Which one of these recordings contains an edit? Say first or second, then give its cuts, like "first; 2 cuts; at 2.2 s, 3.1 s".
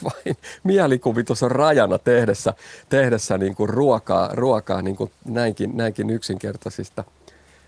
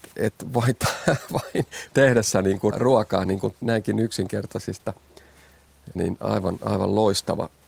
second; 4 cuts; at 1.9 s, 2.7 s, 3.6 s, 6.0 s